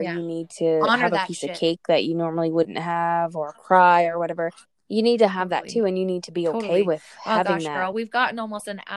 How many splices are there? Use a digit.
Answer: 2